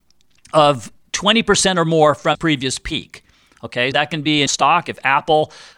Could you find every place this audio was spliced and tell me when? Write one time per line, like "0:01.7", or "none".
0:02.3
0:03.9
0:04.5